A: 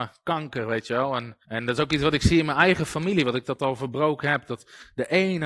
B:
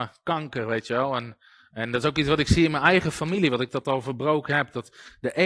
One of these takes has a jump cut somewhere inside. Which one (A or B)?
A